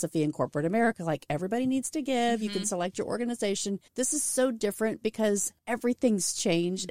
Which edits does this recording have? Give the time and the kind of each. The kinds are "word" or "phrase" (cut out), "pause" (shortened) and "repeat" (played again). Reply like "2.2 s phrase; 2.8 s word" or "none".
3.9 s pause; 5.6 s pause